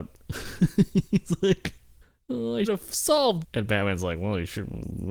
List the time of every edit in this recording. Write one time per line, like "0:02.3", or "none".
0:02.0
0:02.6
0:03.4